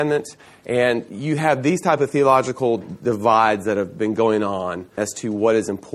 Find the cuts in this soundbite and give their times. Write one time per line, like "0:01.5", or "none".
0:05.0

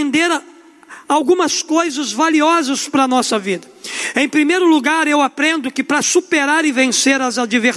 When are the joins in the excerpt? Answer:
none

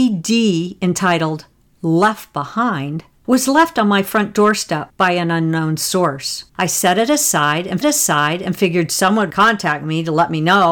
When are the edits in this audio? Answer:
0:07.8
0:09.3

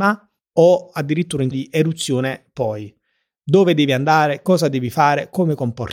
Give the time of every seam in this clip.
0:01.5

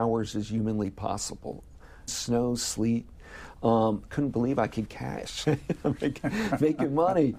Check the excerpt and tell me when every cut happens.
0:02.1
0:04.1
0:04.9
0:05.4

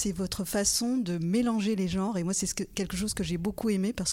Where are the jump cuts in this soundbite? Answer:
none

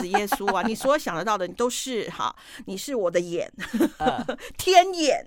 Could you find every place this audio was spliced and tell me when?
none

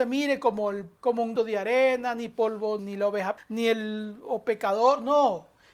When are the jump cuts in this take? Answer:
0:01.0
0:01.4
0:02.8
0:03.4

